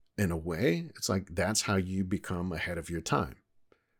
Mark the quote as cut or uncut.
uncut